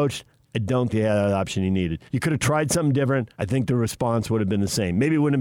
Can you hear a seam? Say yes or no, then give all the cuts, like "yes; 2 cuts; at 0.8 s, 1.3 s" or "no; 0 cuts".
yes; 3 cuts; at 0.9 s, 2.1 s, 3.3 s